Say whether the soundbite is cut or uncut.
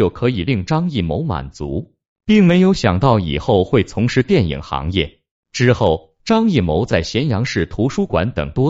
uncut